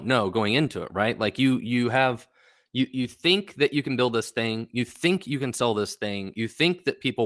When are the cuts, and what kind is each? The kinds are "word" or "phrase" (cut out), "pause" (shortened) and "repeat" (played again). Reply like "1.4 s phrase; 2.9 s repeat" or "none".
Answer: none